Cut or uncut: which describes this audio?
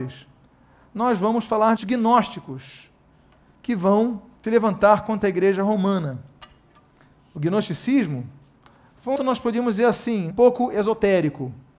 cut